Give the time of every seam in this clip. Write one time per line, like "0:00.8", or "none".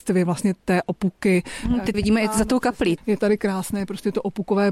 0:01.9